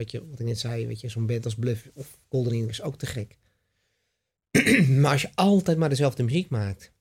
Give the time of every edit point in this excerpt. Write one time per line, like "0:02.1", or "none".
none